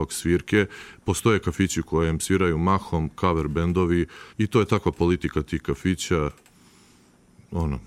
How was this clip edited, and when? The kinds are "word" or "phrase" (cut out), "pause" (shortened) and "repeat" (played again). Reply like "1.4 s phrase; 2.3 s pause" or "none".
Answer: 4.3 s pause